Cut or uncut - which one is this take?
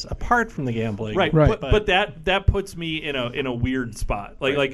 uncut